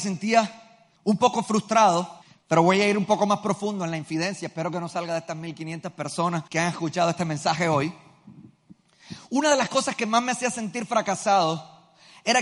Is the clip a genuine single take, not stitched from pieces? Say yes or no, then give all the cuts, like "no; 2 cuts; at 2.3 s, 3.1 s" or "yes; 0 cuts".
no; 3 cuts; at 1.0 s, 2.2 s, 6.5 s